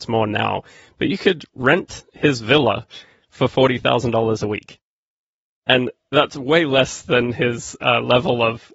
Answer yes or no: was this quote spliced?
no